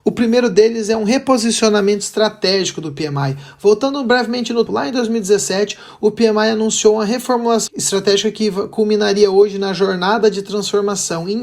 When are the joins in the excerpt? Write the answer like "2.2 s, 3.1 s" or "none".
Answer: 4.7 s, 7.7 s